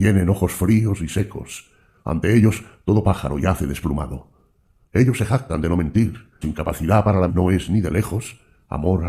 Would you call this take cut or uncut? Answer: cut